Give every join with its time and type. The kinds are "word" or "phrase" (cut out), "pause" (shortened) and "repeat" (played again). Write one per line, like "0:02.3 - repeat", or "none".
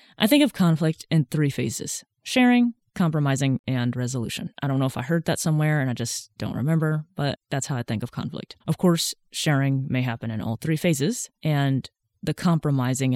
0:08.6 - pause